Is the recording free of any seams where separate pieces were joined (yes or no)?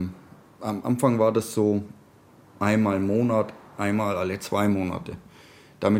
yes